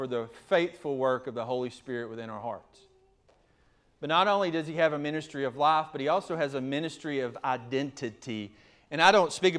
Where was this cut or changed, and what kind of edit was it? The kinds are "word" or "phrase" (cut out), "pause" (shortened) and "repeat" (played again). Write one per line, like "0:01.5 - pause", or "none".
none